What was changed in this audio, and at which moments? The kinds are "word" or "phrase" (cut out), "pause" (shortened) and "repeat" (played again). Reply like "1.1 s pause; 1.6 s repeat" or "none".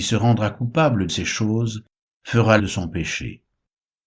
1.1 s phrase; 2.6 s word